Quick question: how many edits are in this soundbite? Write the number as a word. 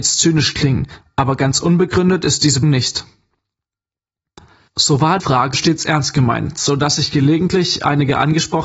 three